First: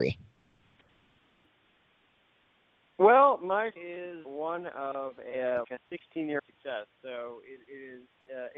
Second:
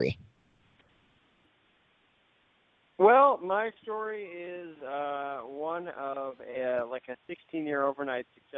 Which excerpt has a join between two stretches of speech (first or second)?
first